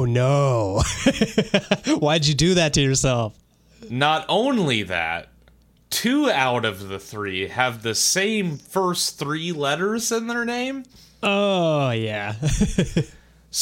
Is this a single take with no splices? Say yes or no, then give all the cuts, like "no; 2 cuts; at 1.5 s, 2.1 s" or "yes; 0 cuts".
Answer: yes; 0 cuts